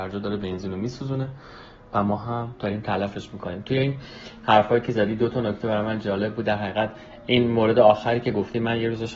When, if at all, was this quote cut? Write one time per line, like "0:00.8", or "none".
none